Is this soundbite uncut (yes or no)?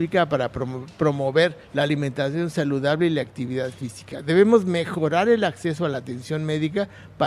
no